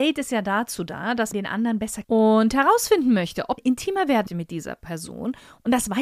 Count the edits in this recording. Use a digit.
4